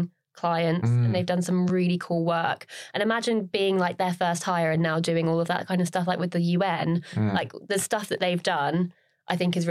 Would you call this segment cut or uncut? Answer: uncut